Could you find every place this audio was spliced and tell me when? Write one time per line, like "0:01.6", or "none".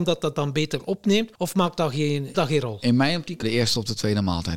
0:01.3
0:02.3
0:03.4